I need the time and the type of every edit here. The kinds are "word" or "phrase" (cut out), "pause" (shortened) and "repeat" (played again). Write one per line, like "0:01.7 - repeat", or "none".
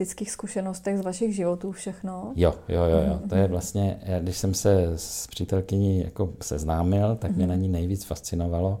none

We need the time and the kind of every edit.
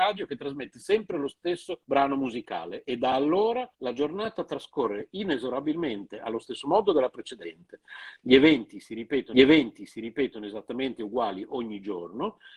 0:01.8 - pause
0:03.7 - pause
0:09.3 - repeat

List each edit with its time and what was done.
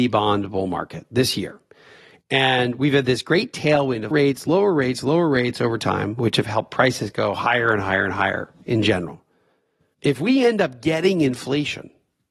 0:04.1 - word

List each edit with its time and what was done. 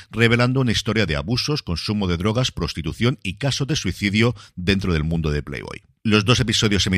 none

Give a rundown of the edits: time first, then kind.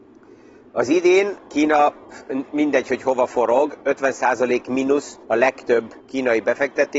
0:05.2 - pause
0:06.0 - pause

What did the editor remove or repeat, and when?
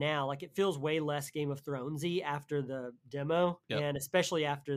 0:03.6 - pause

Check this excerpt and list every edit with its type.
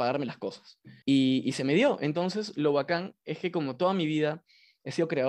0:01.0 - pause

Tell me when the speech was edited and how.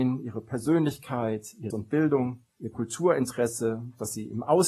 0:01.7 - word
0:02.5 - pause

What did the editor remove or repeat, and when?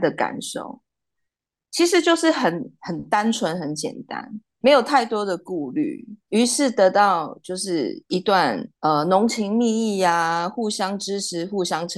0:04.6 - word
0:06.3 - word
0:08.7 - pause

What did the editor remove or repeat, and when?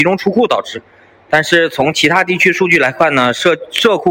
none

